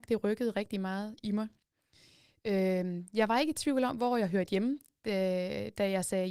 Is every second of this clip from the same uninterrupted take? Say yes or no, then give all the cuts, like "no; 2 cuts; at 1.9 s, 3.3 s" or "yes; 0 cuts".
yes; 0 cuts